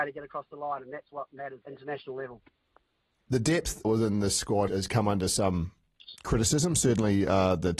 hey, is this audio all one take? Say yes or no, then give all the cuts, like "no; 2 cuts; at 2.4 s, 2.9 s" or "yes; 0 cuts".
no; 3 cuts; at 1.6 s, 3.8 s, 4.7 s